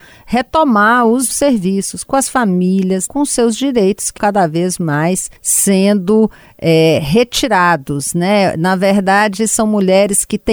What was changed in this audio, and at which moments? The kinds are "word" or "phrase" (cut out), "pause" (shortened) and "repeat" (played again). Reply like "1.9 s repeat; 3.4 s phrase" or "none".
1.3 s phrase; 3.1 s word; 4.2 s word; 5.4 s pause